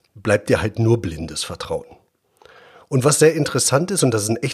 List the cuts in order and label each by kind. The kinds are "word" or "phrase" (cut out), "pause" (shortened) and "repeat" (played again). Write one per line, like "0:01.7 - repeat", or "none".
none